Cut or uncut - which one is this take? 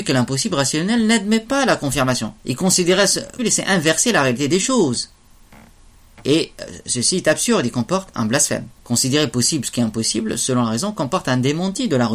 cut